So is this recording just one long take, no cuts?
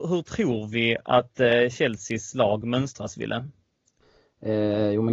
yes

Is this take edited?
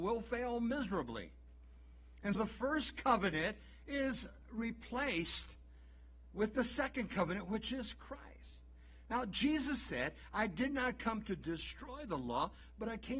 yes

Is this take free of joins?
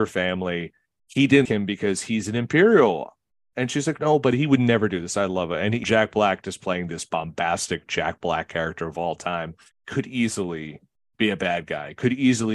no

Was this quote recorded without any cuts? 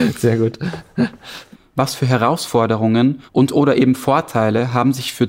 no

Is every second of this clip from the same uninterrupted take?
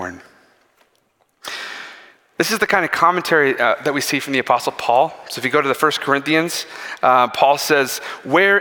yes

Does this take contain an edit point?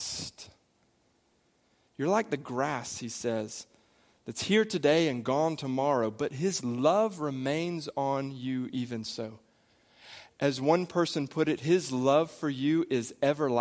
no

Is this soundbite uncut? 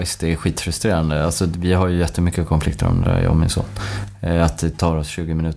yes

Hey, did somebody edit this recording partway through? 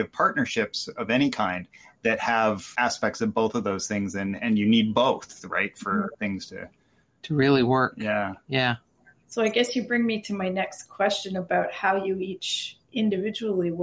no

